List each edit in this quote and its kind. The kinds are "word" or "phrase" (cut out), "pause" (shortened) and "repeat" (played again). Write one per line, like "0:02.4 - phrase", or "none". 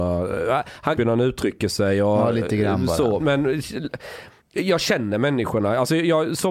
0:01.0 - phrase
0:03.2 - word
0:04.4 - pause